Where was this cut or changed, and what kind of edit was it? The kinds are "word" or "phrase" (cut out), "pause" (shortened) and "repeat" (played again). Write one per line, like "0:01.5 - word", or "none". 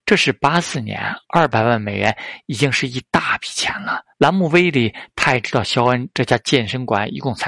0:01.2 - pause
0:04.1 - pause